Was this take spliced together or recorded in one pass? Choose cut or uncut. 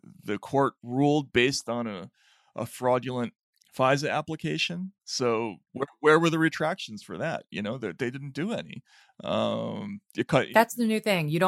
uncut